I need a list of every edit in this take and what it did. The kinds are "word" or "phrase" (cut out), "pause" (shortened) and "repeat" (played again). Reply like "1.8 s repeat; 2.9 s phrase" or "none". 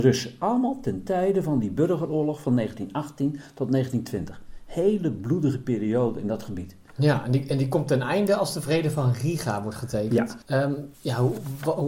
10.4 s pause; 10.9 s pause